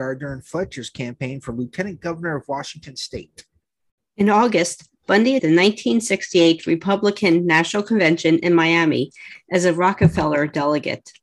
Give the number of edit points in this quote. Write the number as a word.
two